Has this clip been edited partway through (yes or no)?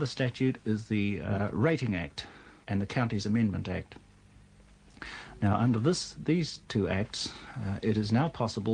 yes